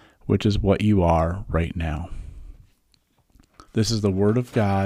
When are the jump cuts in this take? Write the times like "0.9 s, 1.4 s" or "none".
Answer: 3.7 s